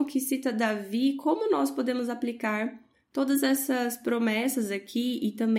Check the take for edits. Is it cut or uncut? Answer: uncut